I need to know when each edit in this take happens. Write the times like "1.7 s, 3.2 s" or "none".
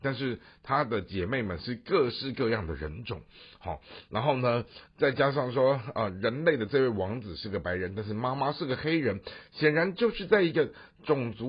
none